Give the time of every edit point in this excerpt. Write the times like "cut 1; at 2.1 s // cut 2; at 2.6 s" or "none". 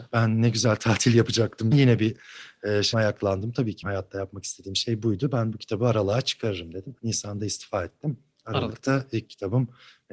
cut 1; at 1.7 s // cut 2; at 2.9 s // cut 3; at 3.8 s // cut 4; at 7.0 s